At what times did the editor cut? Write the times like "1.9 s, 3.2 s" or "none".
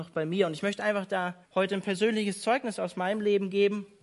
1.4 s